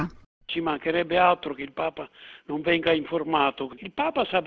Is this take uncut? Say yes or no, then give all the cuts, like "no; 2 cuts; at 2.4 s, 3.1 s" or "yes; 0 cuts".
yes; 0 cuts